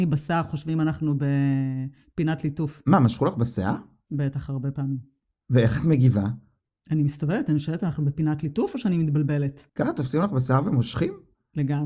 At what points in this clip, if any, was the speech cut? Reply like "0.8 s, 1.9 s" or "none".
none